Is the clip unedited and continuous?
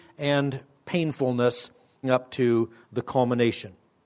no; 1 cut; at 2.0 s

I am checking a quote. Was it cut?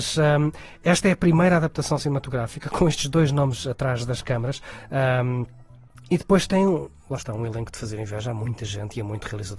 no; 0 cuts

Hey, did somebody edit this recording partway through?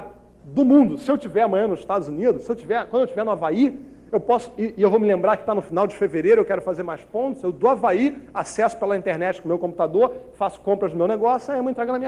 no; 0 cuts

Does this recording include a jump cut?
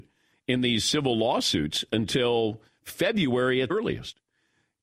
yes; 1 cut; at 3.7 s

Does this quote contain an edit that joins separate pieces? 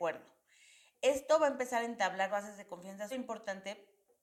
yes; 2 cuts; at 2.3 s, 3.1 s

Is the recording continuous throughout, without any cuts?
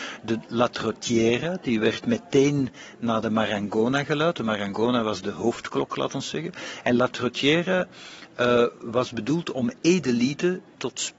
yes; 0 cuts

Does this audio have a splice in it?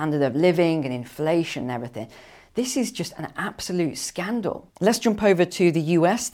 no; 0 cuts

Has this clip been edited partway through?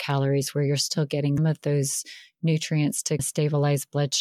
yes; 2 cuts; at 1.4 s, 3.2 s

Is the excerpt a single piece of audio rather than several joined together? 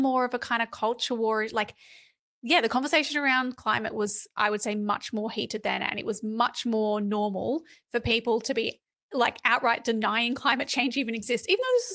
yes; 0 cuts

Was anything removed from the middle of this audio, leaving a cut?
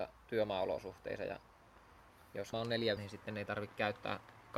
yes; 2 cuts; at 2.5 s, 3.0 s

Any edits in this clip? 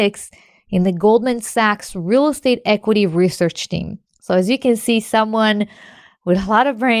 yes; 1 cut; at 4.1 s

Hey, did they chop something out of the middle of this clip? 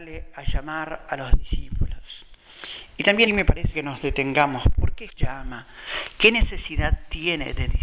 yes; 3 cuts; at 3.3 s, 3.7 s, 5.1 s

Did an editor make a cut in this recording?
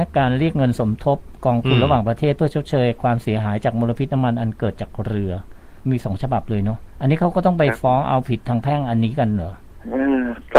yes; 1 cut; at 5.8 s

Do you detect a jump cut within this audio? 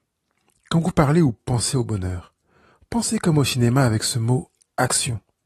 no; 0 cuts

